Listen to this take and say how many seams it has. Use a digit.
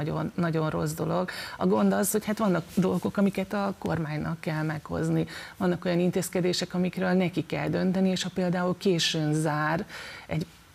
0